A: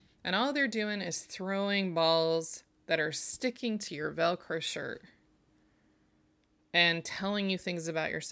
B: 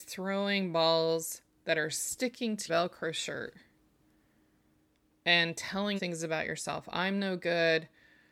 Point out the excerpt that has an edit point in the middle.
B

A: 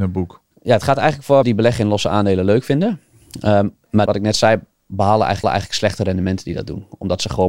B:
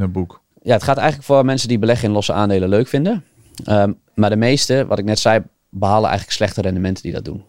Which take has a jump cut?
A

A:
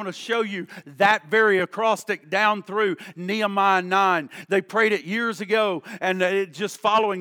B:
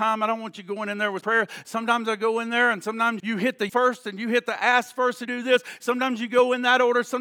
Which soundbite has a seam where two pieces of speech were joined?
B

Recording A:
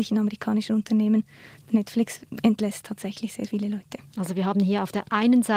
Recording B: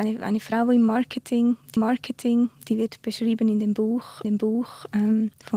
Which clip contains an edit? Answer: B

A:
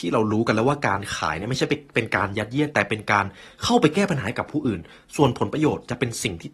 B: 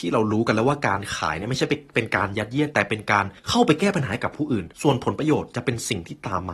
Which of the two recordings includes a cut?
B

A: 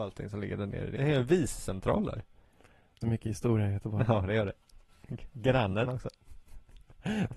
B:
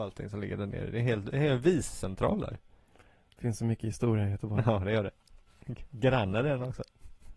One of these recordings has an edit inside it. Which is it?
A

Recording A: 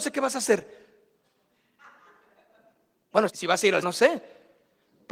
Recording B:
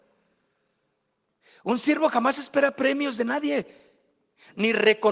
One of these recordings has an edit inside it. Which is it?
A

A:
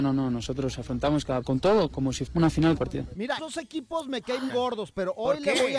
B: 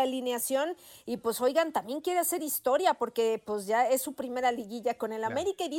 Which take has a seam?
A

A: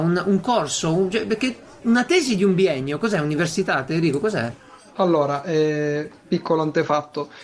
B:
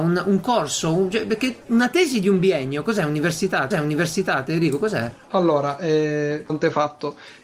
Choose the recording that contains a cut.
B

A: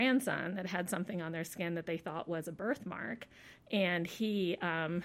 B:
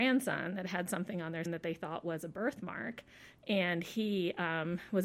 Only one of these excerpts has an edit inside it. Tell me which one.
B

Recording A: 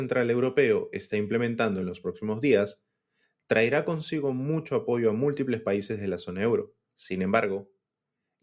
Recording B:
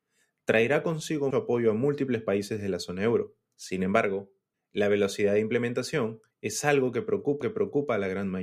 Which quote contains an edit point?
B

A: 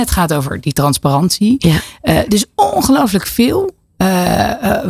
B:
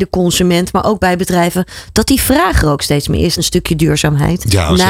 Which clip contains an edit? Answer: B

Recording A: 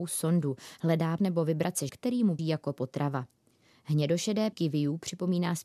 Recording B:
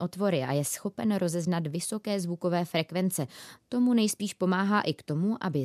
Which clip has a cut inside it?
A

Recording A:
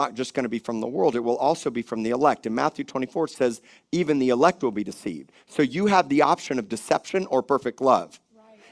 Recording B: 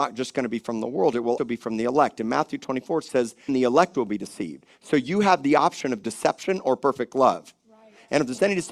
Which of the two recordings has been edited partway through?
B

